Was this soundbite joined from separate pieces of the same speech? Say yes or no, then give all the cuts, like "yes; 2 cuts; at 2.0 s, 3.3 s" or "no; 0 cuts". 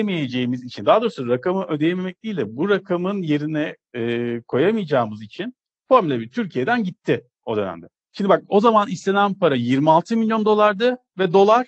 no; 0 cuts